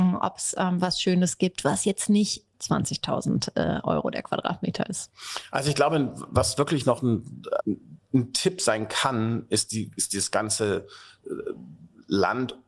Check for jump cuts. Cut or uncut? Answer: cut